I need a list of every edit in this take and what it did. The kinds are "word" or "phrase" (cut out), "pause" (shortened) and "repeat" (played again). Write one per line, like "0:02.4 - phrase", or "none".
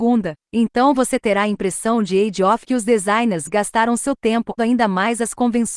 0:02.6 - word
0:04.6 - word